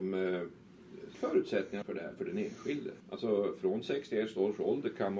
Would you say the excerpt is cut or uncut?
cut